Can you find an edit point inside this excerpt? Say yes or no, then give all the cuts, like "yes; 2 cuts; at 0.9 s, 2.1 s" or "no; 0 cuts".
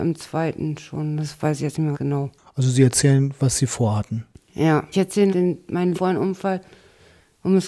yes; 4 cuts; at 1.9 s, 4.9 s, 5.3 s, 5.9 s